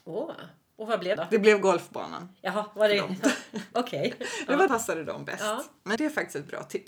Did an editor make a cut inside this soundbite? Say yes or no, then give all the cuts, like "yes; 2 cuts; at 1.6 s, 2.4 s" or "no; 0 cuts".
yes; 3 cuts; at 1.2 s, 4.7 s, 6.0 s